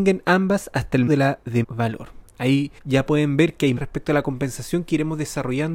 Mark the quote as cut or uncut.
cut